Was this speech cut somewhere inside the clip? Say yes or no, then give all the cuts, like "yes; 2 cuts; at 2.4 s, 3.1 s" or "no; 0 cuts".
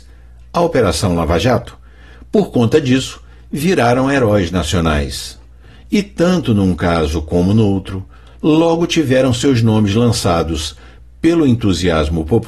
no; 0 cuts